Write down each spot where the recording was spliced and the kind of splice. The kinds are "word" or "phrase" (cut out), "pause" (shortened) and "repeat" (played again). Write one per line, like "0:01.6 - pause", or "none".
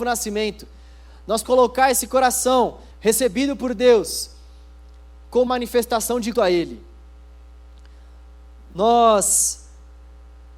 0:01.4 - word
0:02.9 - pause
0:05.5 - word
0:06.3 - word